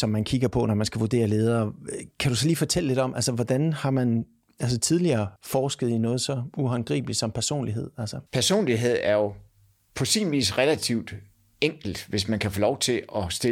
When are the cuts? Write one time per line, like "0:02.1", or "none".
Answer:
0:05.4
0:08.3